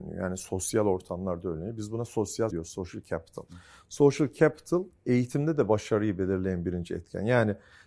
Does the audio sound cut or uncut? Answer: cut